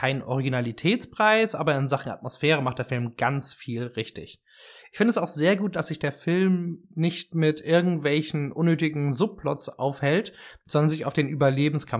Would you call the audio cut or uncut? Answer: uncut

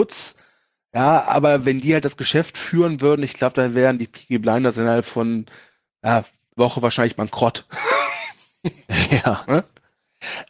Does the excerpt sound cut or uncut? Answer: cut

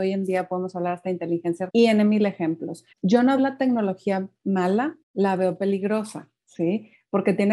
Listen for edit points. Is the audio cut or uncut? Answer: cut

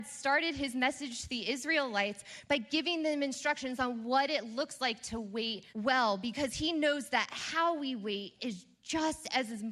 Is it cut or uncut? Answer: cut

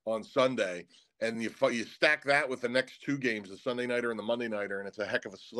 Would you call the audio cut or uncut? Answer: uncut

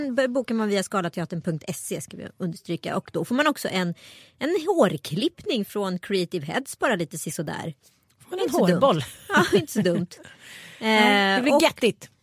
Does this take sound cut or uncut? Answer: uncut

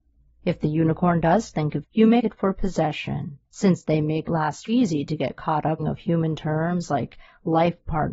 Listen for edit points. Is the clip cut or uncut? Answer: cut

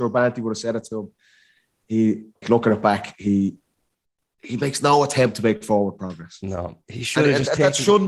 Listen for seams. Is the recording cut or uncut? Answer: cut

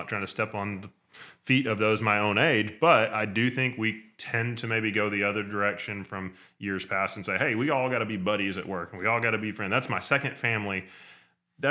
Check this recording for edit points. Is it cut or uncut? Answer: uncut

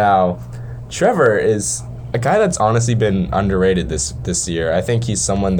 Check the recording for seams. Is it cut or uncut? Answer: uncut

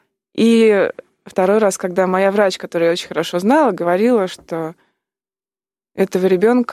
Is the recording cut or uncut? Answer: uncut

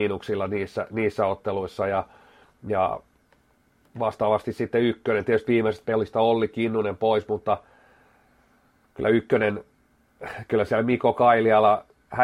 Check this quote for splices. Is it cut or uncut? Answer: uncut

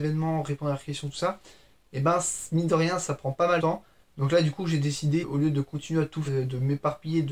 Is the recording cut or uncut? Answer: cut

